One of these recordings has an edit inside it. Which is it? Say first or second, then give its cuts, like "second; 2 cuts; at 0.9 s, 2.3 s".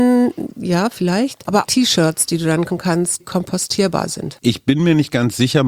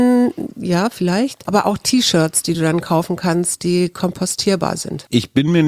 first; 3 cuts; at 1.6 s, 2.7 s, 3.2 s